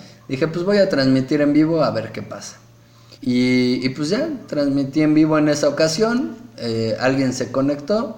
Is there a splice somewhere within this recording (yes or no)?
yes